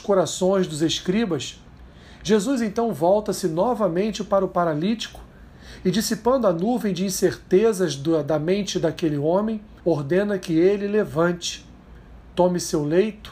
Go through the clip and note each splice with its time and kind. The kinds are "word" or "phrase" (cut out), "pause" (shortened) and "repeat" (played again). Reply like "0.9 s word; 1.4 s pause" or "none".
9.8 s pause